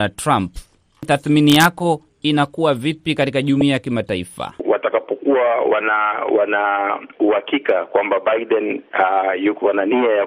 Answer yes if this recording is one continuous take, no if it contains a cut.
no